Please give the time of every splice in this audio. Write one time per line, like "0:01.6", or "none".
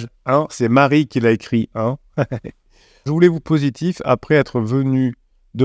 0:03.1
0:03.4